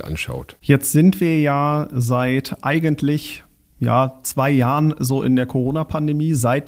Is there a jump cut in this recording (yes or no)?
no